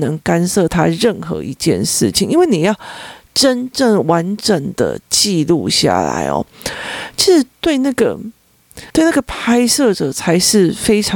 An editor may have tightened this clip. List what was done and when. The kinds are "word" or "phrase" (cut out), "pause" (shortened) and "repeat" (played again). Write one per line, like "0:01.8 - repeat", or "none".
0:08.9 - pause